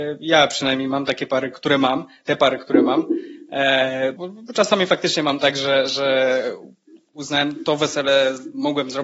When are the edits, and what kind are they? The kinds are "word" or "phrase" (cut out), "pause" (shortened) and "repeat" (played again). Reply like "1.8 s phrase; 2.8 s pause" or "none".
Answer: 1.5 s word; 4.2 s word